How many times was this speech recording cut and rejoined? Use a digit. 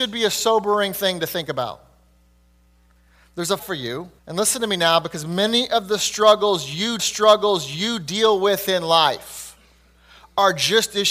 3